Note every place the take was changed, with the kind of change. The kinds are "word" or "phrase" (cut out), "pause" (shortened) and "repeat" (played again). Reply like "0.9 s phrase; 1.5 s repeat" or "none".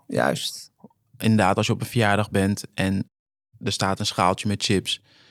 none